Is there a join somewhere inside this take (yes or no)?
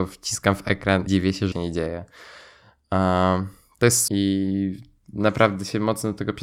yes